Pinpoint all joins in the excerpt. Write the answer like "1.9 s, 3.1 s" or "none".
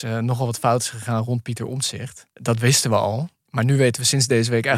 2.3 s, 3.4 s